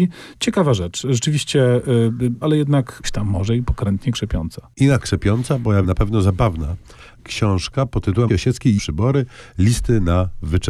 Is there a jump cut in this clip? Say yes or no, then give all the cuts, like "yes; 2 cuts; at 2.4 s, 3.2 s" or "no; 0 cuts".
yes; 7 cuts; at 2.4 s, 3.0 s, 5.0 s, 5.8 s, 7.2 s, 8.3 s, 8.8 s